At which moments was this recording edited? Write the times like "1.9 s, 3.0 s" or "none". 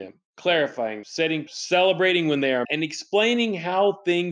1.0 s, 1.5 s, 2.6 s